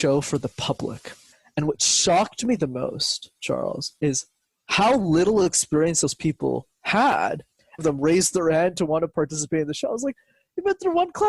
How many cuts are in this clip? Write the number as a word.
one